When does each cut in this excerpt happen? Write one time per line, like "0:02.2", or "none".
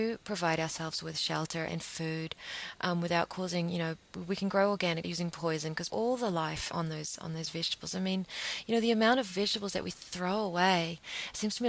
0:01.7
0:05.0
0:05.9
0:06.7